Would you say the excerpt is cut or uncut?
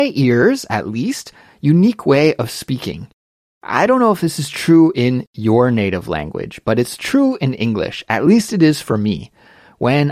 uncut